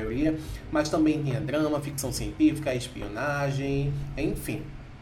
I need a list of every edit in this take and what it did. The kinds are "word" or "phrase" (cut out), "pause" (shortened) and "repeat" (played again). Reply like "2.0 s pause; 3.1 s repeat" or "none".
none